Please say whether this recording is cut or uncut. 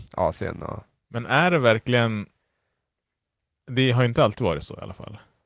uncut